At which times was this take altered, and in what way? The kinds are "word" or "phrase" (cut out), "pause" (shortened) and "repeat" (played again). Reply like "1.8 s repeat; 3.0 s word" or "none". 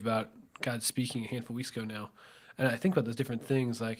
none